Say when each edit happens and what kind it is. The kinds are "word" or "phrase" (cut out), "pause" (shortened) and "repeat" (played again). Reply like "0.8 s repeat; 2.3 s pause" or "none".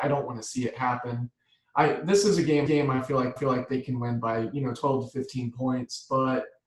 2.7 s repeat; 3.4 s repeat